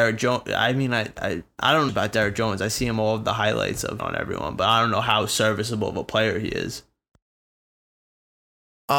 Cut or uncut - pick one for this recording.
cut